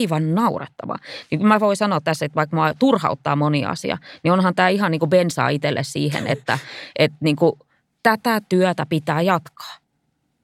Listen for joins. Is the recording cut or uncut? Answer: uncut